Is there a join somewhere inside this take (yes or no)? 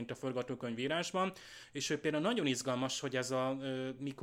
no